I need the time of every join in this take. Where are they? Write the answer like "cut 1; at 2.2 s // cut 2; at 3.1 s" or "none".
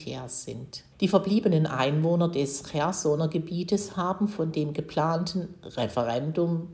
cut 1; at 0.9 s